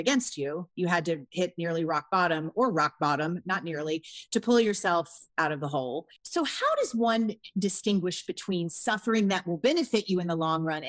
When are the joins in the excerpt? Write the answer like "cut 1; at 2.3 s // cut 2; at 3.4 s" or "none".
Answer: cut 1; at 5.3 s // cut 2; at 6.2 s